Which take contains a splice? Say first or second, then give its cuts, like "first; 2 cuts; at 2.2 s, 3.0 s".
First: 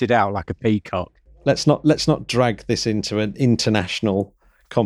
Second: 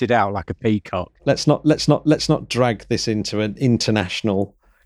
second; 2 cuts; at 1.2 s, 1.9 s